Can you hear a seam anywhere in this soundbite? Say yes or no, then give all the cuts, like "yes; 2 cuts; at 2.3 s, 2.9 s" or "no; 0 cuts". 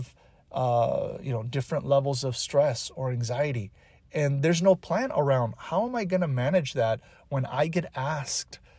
no; 0 cuts